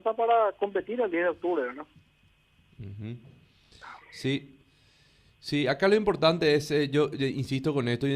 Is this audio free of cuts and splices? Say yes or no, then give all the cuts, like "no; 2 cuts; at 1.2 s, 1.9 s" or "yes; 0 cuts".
yes; 0 cuts